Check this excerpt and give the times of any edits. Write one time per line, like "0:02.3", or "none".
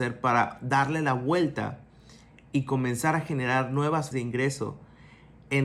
0:04.1